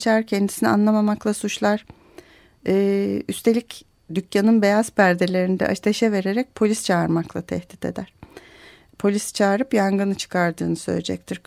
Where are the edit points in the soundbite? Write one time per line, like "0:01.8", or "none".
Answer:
none